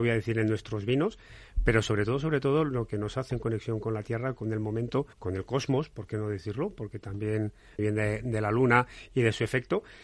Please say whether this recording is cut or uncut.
cut